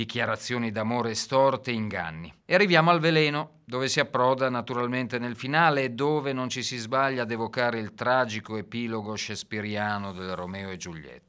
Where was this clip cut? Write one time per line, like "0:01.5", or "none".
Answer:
0:02.4
0:03.6